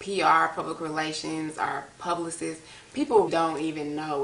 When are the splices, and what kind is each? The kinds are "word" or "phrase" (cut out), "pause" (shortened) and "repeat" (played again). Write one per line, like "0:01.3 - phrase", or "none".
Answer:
0:03.3 - word